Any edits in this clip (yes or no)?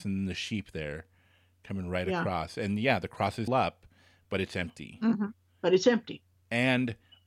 yes